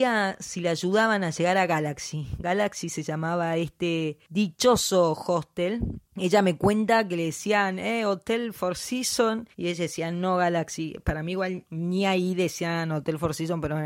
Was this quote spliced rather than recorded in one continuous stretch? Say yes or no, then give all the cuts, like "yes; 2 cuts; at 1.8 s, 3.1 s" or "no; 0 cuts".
yes; 2 cuts; at 9.5 s, 11.7 s